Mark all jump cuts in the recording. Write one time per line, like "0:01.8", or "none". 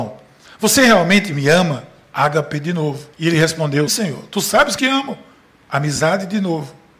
0:03.1
0:03.9
0:04.8